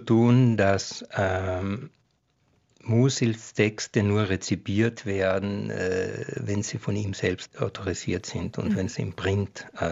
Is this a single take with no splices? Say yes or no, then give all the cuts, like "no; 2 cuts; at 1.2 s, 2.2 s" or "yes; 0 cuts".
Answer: yes; 0 cuts